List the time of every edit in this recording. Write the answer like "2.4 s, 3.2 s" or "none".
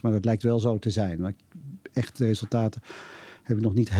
none